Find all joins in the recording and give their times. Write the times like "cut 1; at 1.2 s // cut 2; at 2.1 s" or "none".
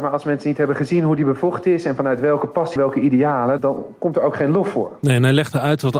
cut 1; at 2.8 s // cut 2; at 3.6 s